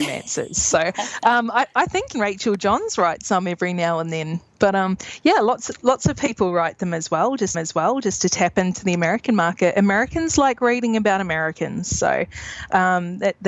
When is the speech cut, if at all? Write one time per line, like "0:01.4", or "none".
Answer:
0:02.1
0:07.5